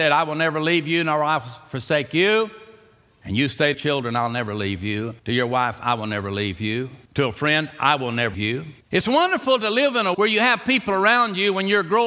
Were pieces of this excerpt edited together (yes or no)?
yes